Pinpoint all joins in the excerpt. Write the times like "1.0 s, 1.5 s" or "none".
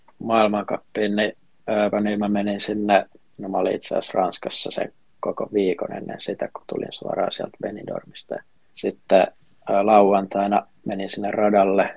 1.9 s, 6.6 s